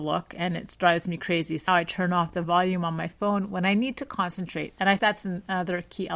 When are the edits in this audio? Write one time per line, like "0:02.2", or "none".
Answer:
0:01.7
0:05.0